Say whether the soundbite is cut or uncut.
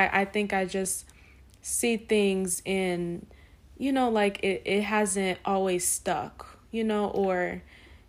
uncut